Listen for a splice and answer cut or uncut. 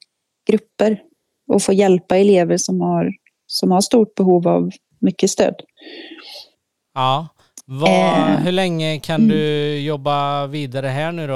uncut